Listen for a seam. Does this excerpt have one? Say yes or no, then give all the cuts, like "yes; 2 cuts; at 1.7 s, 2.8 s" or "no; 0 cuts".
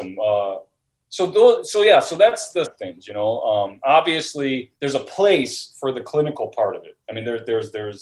yes; 2 cuts; at 2.6 s, 4.7 s